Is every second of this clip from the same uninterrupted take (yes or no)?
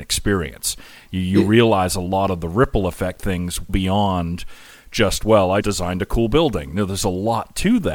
no